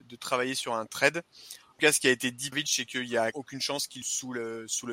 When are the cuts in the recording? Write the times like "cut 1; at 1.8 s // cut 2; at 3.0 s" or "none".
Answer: cut 1; at 1.8 s // cut 2; at 2.5 s // cut 3; at 3.3 s // cut 4; at 4.0 s